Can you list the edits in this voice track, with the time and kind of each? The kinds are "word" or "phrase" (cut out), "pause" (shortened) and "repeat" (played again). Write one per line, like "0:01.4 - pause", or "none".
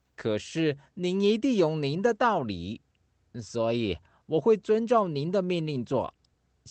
none